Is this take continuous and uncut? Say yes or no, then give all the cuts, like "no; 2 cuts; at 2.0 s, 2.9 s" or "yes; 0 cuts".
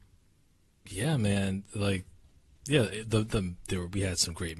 yes; 0 cuts